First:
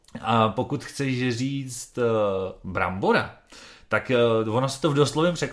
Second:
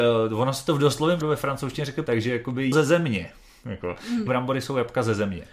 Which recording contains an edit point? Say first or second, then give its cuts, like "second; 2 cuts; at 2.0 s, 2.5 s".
second; 4 cuts; at 1.2 s, 2.1 s, 2.7 s, 4.3 s